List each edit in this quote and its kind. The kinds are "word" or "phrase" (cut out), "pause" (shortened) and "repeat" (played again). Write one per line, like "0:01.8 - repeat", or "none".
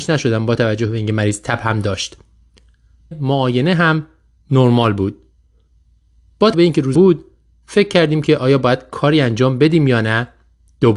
0:03.1 - word
0:06.5 - word
0:06.9 - word